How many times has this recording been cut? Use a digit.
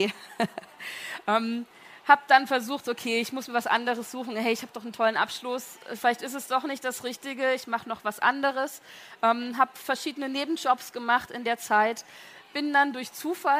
0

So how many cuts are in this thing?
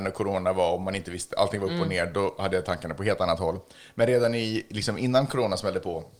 0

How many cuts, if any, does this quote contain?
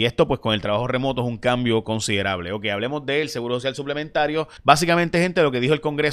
1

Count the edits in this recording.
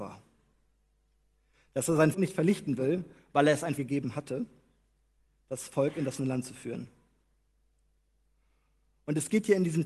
3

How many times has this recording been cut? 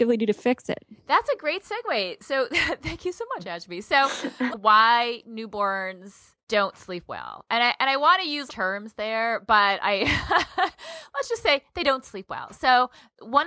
3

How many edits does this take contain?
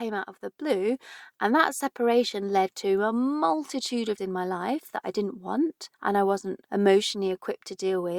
3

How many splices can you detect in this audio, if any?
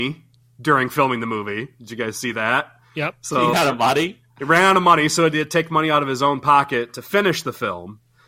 1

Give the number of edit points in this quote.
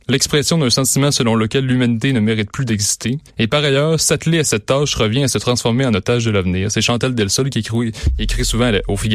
1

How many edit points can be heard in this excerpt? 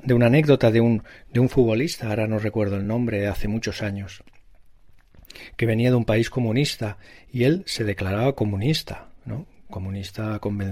0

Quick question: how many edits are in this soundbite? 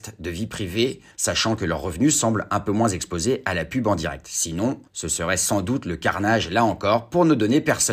2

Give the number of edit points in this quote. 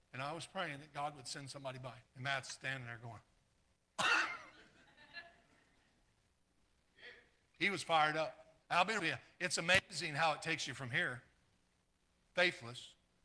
3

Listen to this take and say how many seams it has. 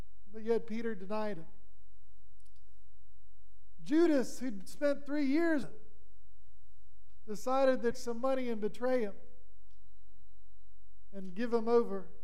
2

